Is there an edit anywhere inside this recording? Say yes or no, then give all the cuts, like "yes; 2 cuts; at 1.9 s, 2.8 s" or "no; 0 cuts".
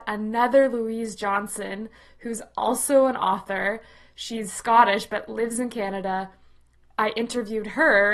no; 0 cuts